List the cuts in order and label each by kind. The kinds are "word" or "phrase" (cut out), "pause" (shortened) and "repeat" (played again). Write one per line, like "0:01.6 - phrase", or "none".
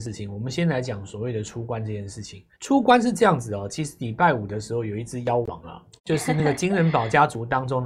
0:02.5 - pause
0:06.0 - phrase